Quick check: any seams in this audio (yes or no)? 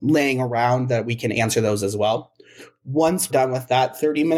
yes